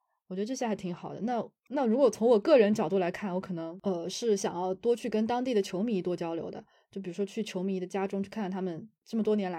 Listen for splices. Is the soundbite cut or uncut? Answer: uncut